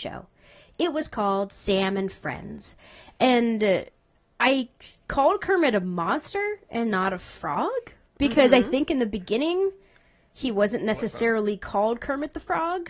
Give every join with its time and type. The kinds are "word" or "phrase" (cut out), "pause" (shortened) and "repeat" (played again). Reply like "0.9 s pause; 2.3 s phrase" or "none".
none